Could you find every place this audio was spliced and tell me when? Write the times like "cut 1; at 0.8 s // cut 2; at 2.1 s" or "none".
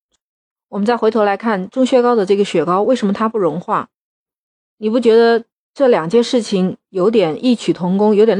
none